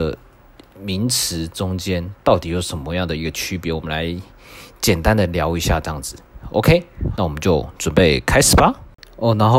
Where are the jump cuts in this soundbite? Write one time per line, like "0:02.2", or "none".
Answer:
0:07.1